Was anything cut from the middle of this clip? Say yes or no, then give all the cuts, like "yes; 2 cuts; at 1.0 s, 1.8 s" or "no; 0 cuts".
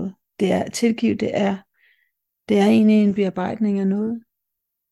no; 0 cuts